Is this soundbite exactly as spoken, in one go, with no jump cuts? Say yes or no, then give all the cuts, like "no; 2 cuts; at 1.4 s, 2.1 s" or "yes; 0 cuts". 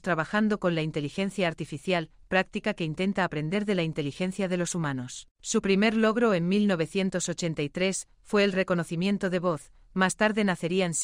no; 1 cut; at 5.3 s